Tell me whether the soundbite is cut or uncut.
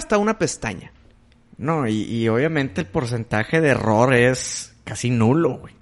uncut